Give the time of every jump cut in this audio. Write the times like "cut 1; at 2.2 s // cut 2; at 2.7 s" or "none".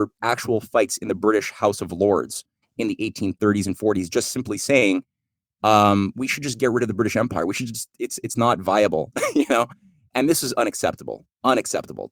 none